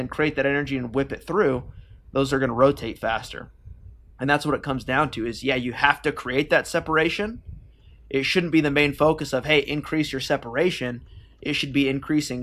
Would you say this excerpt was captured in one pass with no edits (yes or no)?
yes